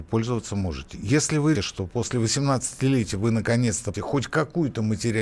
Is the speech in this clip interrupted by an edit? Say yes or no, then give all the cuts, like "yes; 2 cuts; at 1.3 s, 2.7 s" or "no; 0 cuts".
yes; 2 cuts; at 1.6 s, 3.9 s